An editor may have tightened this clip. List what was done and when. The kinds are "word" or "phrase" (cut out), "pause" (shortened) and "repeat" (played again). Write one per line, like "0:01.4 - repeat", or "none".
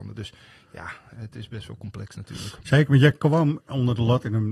none